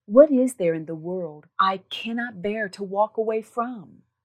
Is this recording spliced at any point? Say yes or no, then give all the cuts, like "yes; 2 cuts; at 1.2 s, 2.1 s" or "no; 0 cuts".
no; 0 cuts